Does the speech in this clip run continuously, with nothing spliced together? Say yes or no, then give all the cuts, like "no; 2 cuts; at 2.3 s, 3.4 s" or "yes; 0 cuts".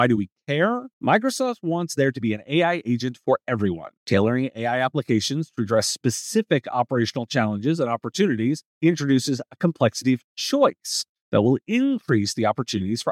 no; 3 cuts; at 0.9 s, 4.0 s, 8.7 s